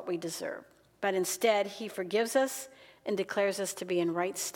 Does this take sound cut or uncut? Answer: uncut